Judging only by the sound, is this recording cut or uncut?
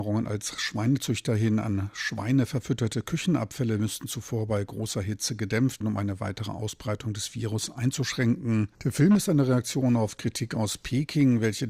cut